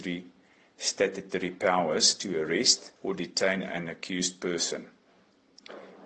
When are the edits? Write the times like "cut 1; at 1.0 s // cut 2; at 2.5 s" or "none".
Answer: cut 1; at 3.0 s